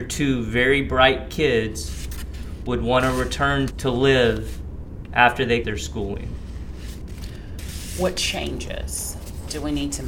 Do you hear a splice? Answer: yes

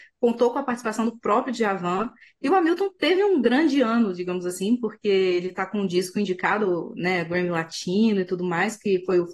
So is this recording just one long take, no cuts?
yes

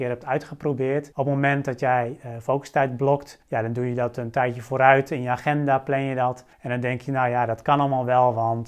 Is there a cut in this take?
yes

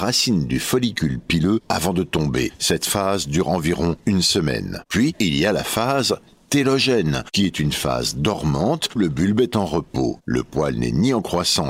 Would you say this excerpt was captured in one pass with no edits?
no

